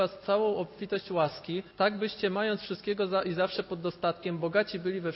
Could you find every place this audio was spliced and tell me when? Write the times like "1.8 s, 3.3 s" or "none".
1.7 s